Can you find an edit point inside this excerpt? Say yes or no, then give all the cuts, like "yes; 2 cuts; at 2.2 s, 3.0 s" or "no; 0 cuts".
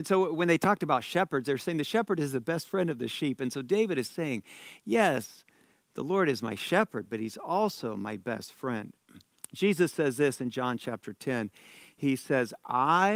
no; 0 cuts